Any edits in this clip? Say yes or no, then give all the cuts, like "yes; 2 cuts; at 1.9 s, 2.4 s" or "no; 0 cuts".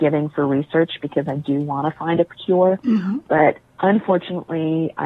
no; 0 cuts